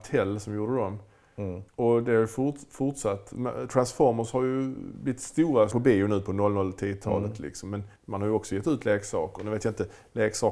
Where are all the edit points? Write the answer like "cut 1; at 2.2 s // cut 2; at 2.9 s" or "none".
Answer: cut 1; at 1.7 s // cut 2; at 5.7 s // cut 3; at 8.0 s